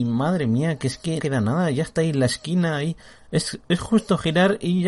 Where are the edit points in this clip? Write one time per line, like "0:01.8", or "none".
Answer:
0:01.2

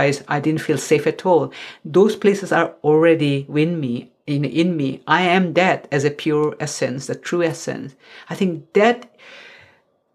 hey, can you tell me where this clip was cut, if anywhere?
none

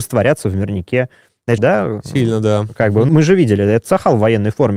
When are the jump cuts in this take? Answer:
0:01.6
0:03.1

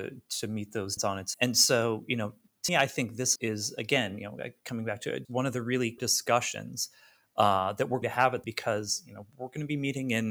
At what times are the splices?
0:01.0
0:01.3
0:02.7
0:03.4
0:05.2
0:06.0
0:08.0
0:08.4

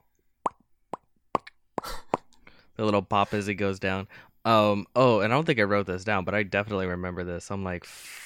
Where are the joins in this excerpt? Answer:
none

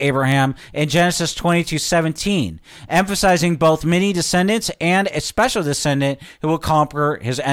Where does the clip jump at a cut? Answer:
none

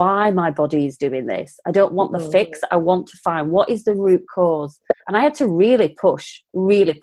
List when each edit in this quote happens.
0:05.0

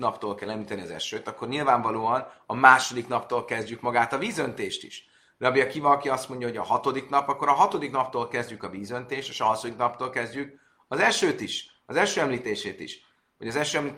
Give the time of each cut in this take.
none

